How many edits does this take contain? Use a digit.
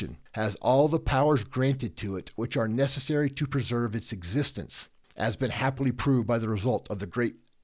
0